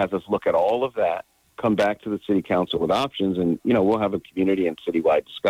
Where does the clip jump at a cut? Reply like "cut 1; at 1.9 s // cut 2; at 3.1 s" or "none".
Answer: none